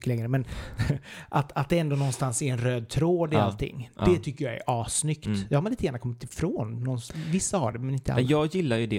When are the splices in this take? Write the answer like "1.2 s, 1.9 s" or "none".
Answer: none